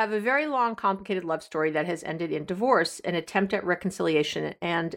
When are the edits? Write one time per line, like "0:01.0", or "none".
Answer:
none